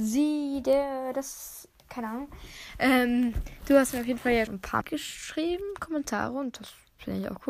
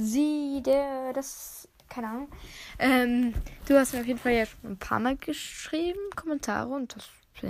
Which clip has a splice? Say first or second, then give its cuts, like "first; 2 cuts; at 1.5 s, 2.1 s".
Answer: first; 2 cuts; at 4.5 s, 4.8 s